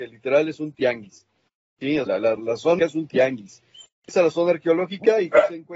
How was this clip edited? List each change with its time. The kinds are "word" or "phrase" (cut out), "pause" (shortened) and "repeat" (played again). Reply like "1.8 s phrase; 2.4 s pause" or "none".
2.1 s word; 2.4 s word; 2.8 s word; 4.1 s word